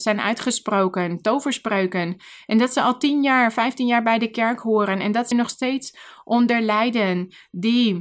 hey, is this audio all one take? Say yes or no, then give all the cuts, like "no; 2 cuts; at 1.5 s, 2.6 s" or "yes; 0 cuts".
no; 1 cut; at 5.3 s